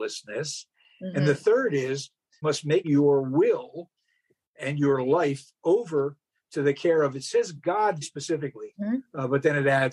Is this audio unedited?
no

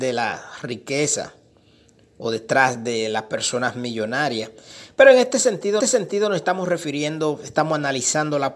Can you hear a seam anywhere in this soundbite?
yes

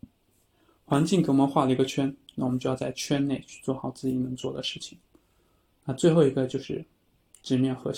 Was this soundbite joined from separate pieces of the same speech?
no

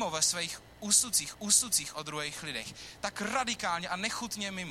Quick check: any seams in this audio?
yes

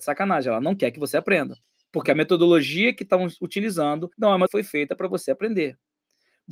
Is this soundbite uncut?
no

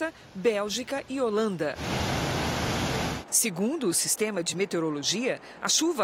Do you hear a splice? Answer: no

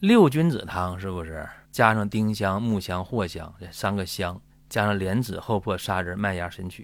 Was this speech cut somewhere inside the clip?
yes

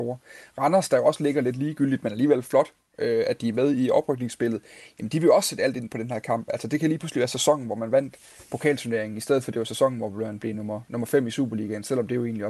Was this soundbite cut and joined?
no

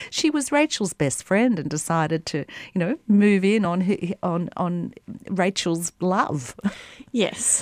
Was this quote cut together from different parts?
no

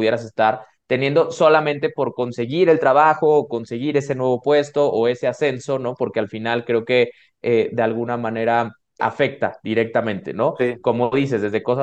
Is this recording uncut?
no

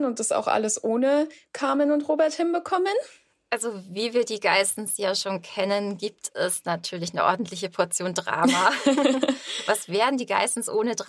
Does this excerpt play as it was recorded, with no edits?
yes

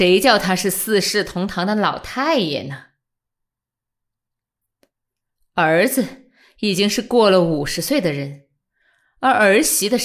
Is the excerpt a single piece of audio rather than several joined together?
yes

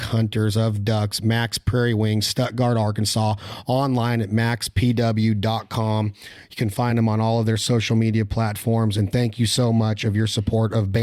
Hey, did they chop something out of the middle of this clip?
no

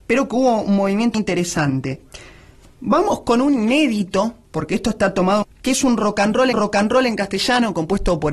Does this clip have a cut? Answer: yes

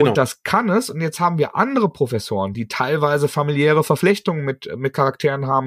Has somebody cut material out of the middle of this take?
no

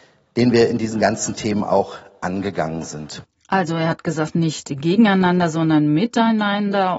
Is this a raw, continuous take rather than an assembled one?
yes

